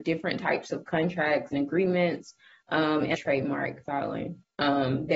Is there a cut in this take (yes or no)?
yes